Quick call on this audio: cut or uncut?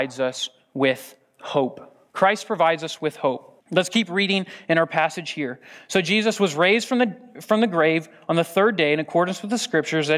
cut